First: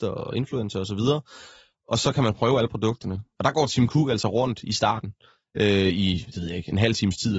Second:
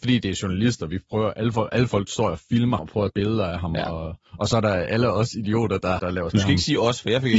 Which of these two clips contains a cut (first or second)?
second